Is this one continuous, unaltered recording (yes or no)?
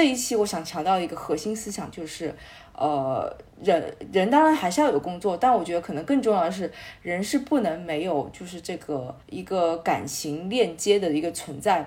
no